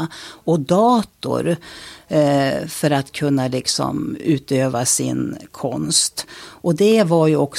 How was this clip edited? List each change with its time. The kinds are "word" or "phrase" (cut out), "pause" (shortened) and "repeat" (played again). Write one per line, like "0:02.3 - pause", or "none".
none